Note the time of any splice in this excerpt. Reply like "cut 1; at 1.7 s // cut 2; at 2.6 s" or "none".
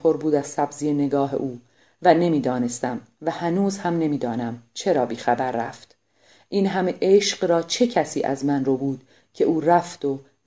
none